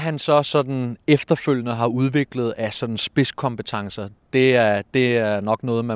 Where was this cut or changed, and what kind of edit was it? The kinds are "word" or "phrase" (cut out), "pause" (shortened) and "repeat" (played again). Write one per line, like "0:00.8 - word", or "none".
none

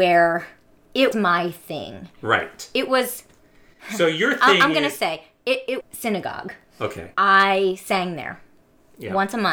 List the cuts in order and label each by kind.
0:01.1 - word
0:05.8 - word
0:07.1 - pause

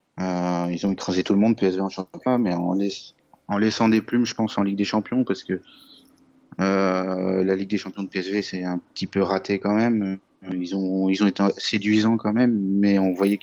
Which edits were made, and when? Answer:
none

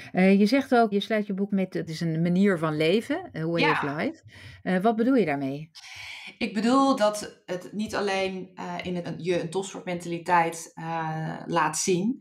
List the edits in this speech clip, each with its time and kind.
0:00.9 - word
0:01.5 - word
0:01.9 - word
0:07.0 - word
0:09.0 - word

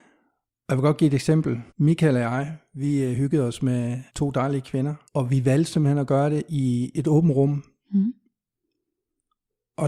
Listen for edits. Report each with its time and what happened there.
0:01.7 - pause
0:04.1 - pause
0:05.1 - pause

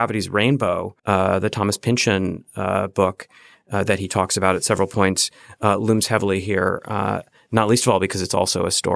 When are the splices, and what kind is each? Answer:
0:01.0 - pause

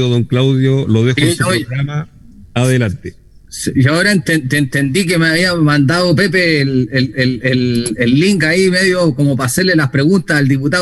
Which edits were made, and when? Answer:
none

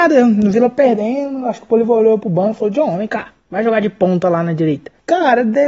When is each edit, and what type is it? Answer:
0:03.4 - pause

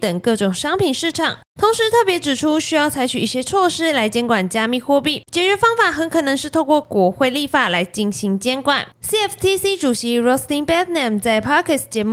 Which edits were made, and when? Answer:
0:05.3 - pause

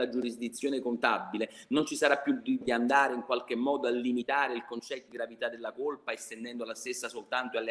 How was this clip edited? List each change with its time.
0:02.6 - word
0:05.1 - word

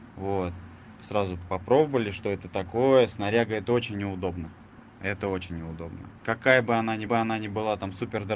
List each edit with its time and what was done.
0:07.1 - repeat

